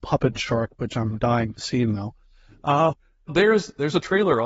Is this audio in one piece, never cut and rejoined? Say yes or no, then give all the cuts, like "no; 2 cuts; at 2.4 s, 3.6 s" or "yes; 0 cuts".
no; 2 cuts; at 2.9 s, 3.3 s